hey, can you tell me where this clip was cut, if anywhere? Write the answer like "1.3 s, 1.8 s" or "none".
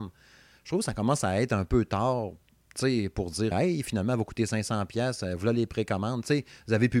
3.5 s

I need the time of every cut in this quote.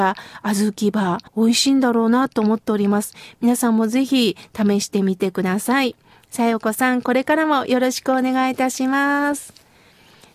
1.3 s

